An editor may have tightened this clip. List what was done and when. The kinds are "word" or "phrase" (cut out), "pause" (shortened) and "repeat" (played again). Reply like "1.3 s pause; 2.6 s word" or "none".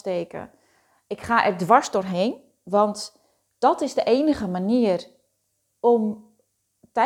none